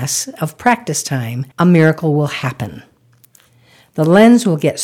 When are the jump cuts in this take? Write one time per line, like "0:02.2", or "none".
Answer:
0:01.5